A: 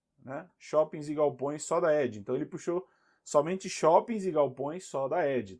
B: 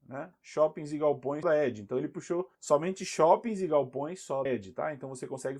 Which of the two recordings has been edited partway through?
B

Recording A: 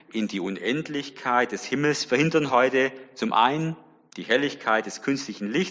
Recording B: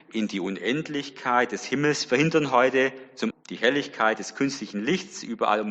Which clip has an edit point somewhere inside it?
B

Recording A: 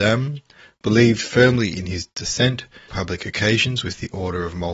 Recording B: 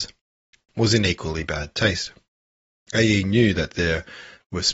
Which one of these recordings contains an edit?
A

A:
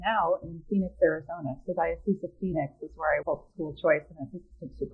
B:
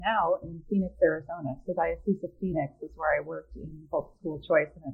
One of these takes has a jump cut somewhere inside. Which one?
A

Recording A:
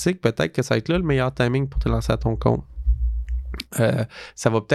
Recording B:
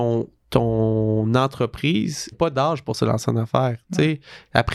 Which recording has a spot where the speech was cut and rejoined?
B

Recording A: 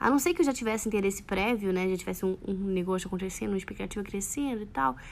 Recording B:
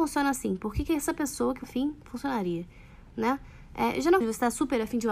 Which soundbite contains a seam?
B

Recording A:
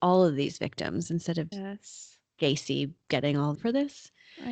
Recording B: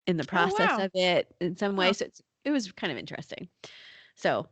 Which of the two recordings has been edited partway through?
A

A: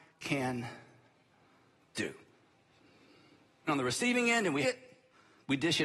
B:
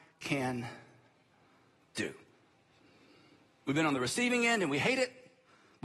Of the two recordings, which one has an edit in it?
A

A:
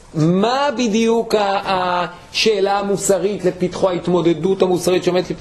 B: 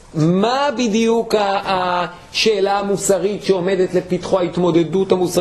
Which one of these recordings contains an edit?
A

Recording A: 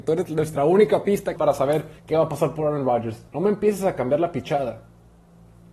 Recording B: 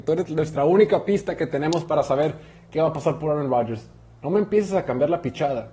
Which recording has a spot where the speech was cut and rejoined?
A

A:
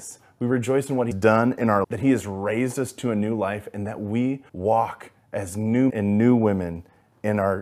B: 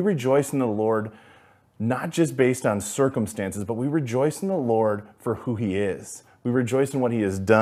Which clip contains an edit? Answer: A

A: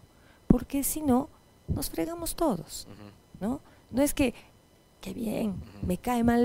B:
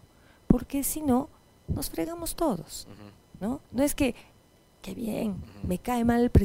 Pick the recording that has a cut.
B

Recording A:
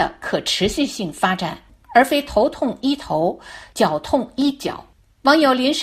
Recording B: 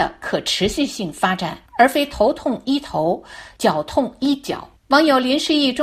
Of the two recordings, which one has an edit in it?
B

